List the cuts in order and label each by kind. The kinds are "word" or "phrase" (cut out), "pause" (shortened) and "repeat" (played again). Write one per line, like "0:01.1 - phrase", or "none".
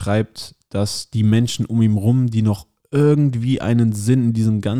none

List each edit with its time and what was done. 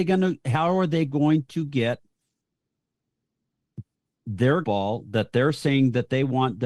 0:04.6 - word

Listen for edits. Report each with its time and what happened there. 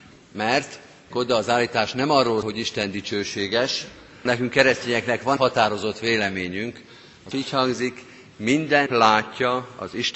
0:01.1 - word
0:02.4 - word
0:04.3 - word
0:05.4 - word
0:07.3 - word
0:08.9 - word

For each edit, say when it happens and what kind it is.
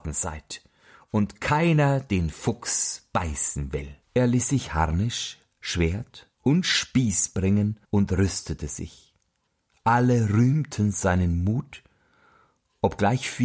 0:04.0 - pause
0:06.3 - pause
0:07.8 - pause
0:09.5 - pause

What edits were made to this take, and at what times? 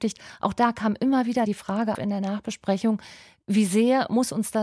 0:01.5 - word
0:01.9 - word

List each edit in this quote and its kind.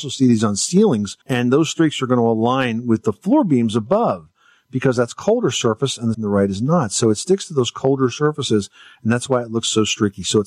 0:01.2 - pause
0:06.1 - phrase

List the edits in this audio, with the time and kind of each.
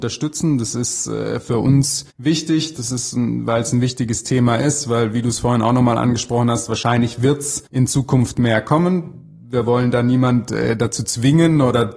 0:02.1 - pause
0:07.7 - pause

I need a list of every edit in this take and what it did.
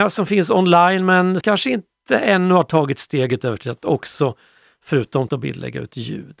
0:01.4 - word
0:05.3 - word

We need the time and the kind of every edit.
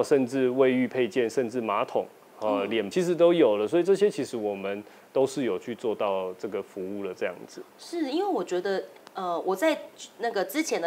0:02.9 - word

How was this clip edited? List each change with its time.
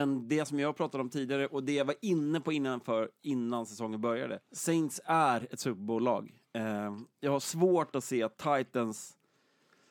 0:04.4 - pause

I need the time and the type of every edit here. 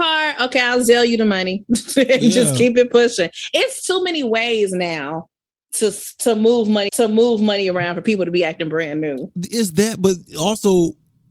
0:06.9 - repeat

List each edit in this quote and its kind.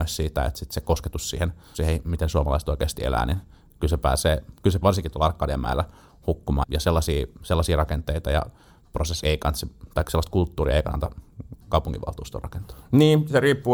0:01.7 - word
0:04.8 - word
0:06.6 - word
0:09.2 - word

